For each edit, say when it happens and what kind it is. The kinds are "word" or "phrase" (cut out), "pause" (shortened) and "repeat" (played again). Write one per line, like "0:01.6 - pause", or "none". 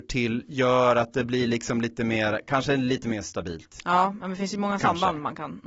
none